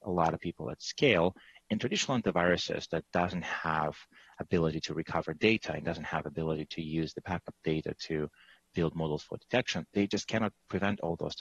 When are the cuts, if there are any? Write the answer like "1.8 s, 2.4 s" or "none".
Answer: none